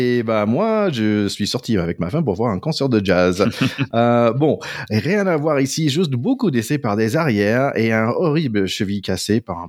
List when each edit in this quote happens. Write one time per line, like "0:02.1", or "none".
none